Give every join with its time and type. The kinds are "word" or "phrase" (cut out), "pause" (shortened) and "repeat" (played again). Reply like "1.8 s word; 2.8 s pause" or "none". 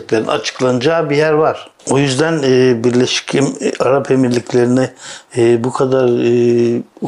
1.8 s pause